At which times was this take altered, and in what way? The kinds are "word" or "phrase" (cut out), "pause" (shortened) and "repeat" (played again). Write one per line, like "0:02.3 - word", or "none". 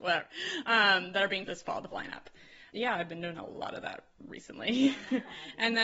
0:01.5 - word
0:01.9 - word
0:02.7 - word